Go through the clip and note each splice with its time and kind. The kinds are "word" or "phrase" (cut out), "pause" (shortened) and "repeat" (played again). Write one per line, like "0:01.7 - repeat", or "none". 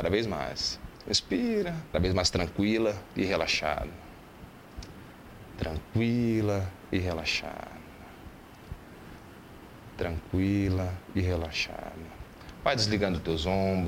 0:01.9 - phrase